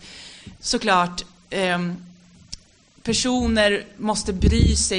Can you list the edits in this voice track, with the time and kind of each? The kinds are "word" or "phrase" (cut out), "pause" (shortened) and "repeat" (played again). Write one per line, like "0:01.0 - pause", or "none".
none